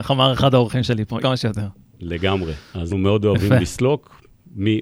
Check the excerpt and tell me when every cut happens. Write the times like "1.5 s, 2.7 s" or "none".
1.2 s, 2.9 s